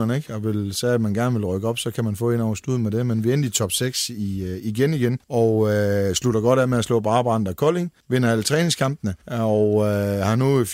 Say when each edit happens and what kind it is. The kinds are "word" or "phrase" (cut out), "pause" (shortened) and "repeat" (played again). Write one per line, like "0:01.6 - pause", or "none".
0:05.2 - pause
0:08.0 - pause
0:09.2 - pause